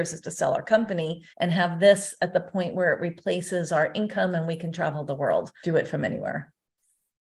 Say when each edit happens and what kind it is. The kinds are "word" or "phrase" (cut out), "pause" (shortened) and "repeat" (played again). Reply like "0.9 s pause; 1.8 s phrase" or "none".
1.3 s pause; 5.6 s phrase